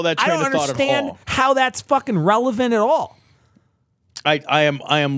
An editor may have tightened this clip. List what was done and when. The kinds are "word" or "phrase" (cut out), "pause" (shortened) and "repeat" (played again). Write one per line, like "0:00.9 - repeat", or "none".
0:01.2 - pause